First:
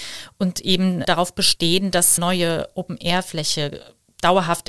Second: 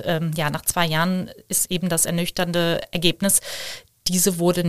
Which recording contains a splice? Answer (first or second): first